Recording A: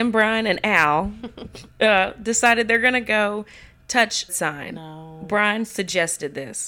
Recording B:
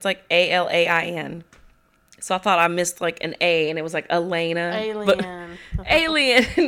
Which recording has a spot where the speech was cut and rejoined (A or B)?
A